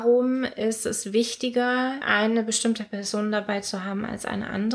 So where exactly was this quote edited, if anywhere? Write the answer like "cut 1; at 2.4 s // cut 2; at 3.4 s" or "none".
none